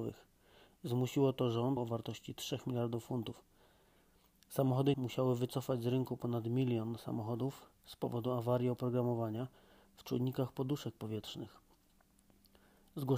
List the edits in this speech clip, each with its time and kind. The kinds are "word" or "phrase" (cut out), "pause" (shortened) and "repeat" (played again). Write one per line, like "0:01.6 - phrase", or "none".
0:01.8 - phrase
0:04.9 - word